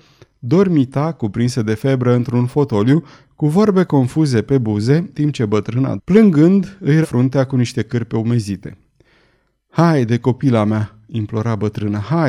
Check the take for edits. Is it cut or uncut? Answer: cut